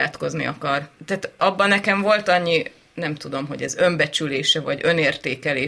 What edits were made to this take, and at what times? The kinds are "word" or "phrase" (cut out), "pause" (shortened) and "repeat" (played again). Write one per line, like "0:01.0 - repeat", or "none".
none